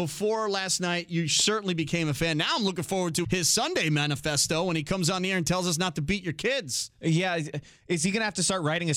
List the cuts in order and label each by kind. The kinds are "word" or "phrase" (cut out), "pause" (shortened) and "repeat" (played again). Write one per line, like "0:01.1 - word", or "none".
0:03.2 - word